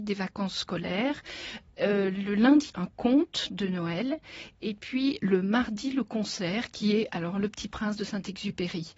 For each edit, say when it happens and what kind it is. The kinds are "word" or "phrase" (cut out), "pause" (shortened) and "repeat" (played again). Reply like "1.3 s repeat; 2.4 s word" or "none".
2.7 s word